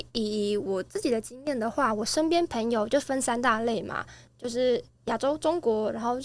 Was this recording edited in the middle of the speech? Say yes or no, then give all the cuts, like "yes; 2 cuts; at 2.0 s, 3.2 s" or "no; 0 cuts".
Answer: no; 0 cuts